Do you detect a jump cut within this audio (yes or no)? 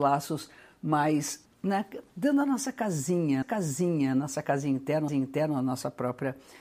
yes